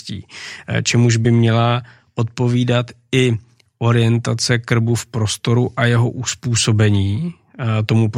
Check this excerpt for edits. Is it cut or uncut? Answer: uncut